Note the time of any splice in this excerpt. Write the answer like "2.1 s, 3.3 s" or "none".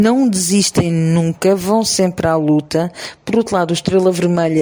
none